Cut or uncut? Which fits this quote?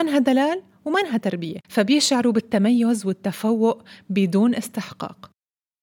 cut